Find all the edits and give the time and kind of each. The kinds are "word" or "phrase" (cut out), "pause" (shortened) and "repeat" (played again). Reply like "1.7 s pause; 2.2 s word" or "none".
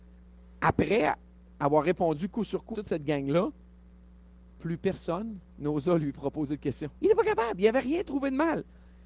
2.7 s word; 5.5 s pause; 6.9 s pause

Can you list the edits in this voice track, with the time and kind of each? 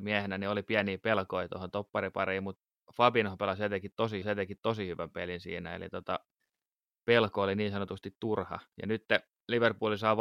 4.2 s repeat

